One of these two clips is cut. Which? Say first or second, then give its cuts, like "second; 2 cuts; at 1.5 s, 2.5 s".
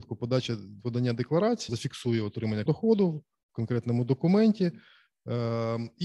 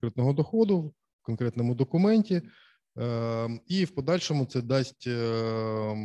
first; 2 cuts; at 1.7 s, 2.7 s